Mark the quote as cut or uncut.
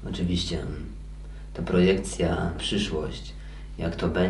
cut